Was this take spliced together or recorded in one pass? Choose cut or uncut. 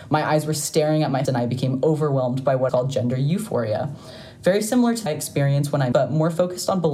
cut